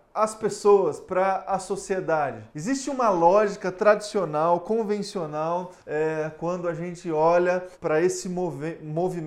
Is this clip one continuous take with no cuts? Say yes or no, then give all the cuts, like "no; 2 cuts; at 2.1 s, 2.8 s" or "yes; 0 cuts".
no; 3 cuts; at 2.5 s, 5.8 s, 7.7 s